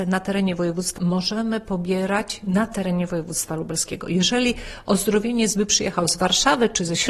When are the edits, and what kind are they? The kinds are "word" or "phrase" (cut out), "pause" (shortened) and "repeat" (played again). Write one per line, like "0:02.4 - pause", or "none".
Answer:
0:01.0 - word